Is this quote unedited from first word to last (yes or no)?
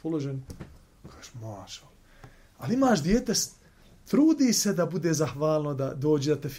yes